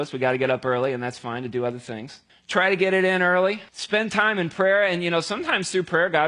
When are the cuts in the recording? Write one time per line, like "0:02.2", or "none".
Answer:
0:02.3
0:03.7